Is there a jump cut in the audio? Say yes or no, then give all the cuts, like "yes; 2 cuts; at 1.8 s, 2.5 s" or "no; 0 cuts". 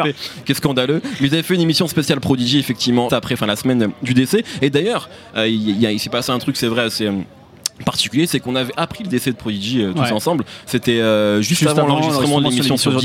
yes; 1 cut; at 3.1 s